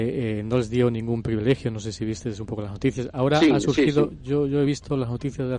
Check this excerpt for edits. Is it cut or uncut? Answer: uncut